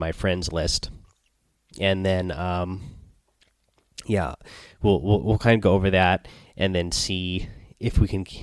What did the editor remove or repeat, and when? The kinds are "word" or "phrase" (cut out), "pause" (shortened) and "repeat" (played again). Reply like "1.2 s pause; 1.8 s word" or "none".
none